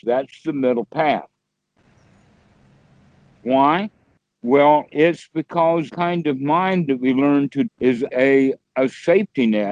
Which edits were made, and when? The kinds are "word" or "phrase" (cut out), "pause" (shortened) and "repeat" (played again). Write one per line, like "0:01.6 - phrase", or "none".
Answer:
0:05.9 - word
0:06.9 - word
0:07.7 - word
0:08.1 - word